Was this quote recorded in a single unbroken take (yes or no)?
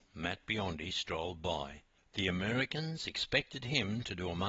yes